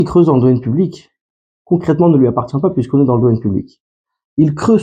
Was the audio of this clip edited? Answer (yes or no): no